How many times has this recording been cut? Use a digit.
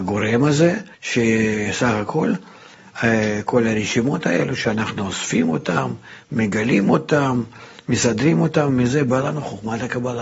1